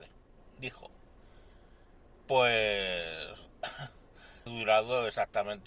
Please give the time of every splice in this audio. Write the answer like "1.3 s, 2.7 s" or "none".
4.5 s